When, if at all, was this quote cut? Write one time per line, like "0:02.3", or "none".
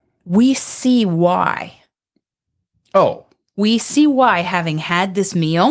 none